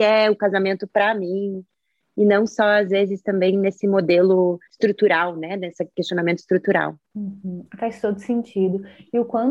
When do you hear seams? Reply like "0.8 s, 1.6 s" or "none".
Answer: 4.7 s, 7.0 s